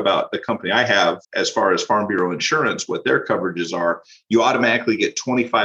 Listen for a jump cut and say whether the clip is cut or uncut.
cut